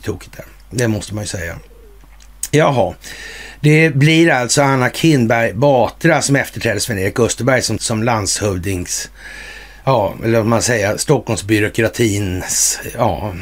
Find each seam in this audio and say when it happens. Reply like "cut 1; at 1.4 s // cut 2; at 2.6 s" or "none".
cut 1; at 7.8 s